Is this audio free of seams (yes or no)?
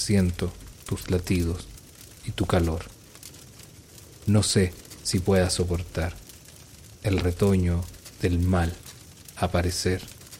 yes